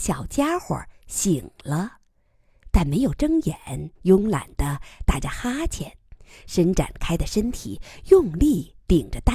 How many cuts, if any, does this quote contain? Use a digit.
1